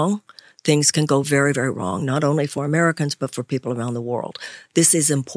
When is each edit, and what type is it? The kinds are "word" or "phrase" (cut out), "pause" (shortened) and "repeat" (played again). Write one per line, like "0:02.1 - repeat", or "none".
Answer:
none